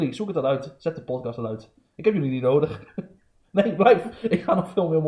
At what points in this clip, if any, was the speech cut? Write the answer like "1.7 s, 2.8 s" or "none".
none